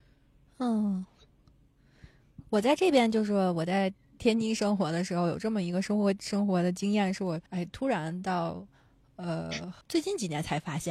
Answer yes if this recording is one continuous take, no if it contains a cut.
no